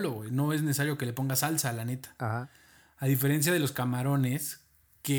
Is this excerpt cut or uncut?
uncut